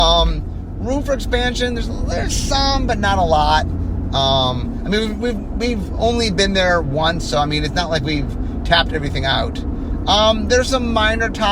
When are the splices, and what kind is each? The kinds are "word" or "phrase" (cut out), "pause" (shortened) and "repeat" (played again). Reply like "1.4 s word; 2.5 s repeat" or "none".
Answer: none